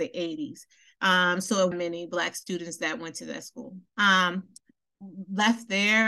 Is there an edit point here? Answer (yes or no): yes